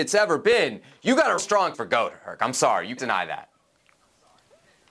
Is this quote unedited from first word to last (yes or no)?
no